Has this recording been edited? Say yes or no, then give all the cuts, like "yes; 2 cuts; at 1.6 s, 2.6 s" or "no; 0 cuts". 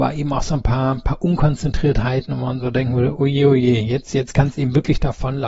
no; 0 cuts